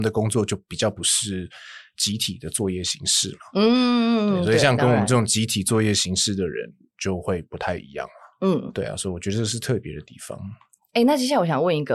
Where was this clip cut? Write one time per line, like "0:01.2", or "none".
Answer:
none